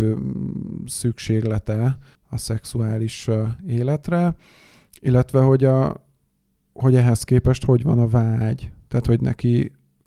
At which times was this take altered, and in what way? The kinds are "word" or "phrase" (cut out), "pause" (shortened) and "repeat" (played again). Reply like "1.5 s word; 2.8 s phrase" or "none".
9.0 s word